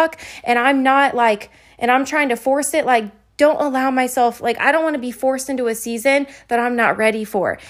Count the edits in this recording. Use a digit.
0